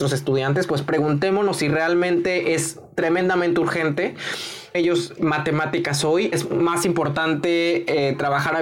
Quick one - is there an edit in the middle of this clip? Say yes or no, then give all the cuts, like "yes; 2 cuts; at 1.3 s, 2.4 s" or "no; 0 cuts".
yes; 3 cuts; at 4.7 s, 5.2 s, 6.3 s